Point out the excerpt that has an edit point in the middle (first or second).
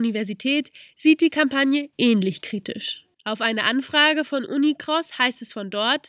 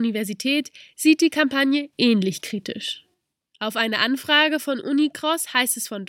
first